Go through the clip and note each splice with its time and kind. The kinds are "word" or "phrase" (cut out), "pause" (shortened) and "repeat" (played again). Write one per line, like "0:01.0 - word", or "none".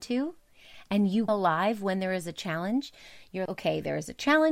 0:01.3 - word
0:03.5 - word